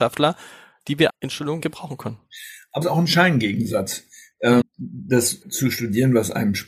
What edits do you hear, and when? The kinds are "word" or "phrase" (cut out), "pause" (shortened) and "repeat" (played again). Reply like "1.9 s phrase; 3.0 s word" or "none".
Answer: 1.1 s word; 1.6 s word; 2.8 s word; 4.6 s word; 5.4 s word